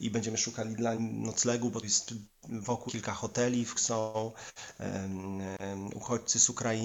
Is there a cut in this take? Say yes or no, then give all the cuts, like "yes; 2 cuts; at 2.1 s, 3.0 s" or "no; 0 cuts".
yes; 4 cuts; at 1.0 s, 1.8 s, 2.9 s, 3.7 s